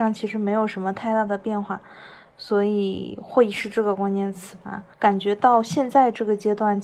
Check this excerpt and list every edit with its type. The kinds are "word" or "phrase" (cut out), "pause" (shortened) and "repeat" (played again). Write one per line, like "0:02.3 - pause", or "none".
0:04.9 - pause